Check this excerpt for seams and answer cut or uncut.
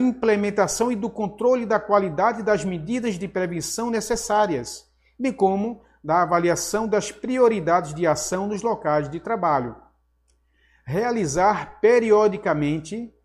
uncut